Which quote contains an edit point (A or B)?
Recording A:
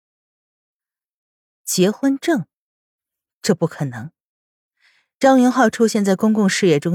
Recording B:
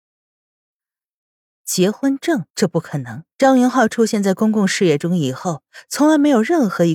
B